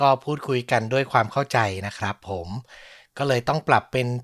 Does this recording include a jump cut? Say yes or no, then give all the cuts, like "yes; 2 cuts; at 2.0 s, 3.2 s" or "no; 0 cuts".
no; 0 cuts